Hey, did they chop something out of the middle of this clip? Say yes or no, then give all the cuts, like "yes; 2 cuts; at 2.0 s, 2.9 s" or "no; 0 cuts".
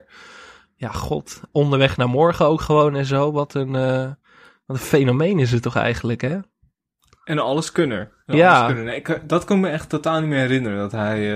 no; 0 cuts